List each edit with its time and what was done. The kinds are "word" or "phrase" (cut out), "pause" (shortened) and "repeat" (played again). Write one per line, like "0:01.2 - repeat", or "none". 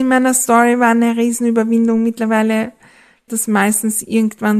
0:03.3 - word